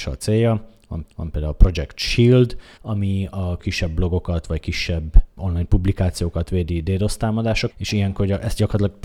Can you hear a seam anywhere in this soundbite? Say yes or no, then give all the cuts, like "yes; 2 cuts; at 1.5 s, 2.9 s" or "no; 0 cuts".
yes; 5 cuts; at 1.0 s, 2.8 s, 3.6 s, 5.4 s, 7.7 s